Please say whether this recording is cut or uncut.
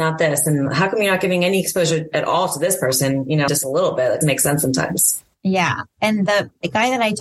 cut